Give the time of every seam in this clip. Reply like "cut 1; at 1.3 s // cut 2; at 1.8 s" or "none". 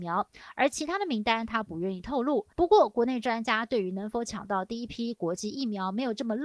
cut 1; at 2.5 s